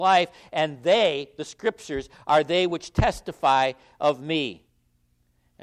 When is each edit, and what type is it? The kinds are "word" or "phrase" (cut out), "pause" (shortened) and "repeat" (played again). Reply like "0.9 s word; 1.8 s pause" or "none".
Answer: none